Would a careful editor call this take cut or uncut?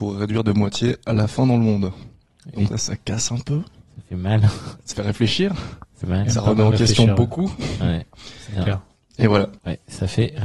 cut